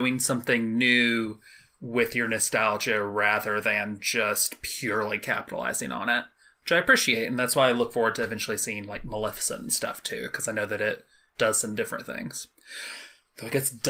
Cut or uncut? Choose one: uncut